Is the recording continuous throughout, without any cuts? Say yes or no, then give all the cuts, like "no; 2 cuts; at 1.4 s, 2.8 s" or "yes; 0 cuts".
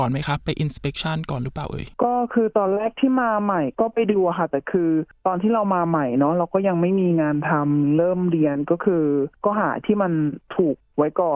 no; 1 cut; at 1.9 s